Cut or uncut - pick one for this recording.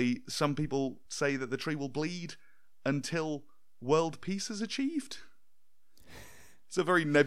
uncut